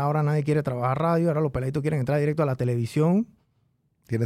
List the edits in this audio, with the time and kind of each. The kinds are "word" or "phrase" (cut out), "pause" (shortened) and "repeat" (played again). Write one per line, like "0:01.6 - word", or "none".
none